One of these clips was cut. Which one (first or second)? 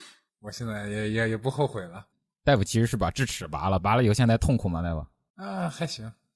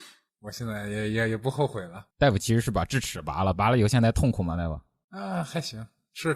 second